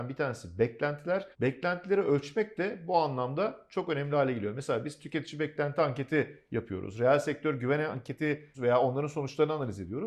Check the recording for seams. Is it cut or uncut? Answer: cut